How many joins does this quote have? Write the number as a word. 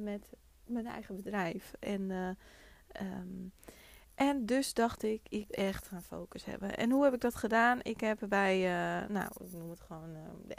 one